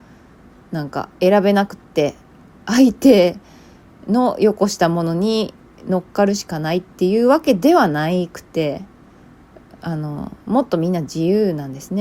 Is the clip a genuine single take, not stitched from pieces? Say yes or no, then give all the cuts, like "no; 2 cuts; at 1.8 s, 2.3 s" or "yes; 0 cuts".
no; 1 cut; at 1.1 s